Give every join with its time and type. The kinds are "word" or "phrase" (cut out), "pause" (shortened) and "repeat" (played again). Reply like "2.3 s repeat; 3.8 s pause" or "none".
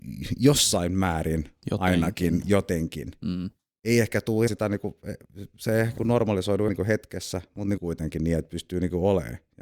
4.5 s word; 6.0 s word; 6.7 s word; 7.8 s word